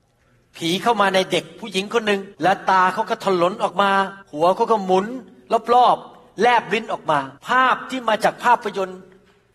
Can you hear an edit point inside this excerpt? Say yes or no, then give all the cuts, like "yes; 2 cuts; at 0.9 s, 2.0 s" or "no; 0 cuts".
yes; 3 cuts; at 2.3 s, 4.2 s, 7.4 s